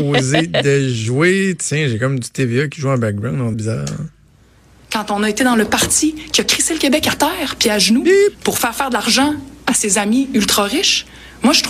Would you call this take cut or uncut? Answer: cut